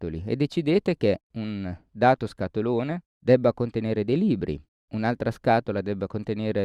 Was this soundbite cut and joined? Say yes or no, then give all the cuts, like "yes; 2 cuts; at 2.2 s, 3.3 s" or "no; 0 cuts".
no; 0 cuts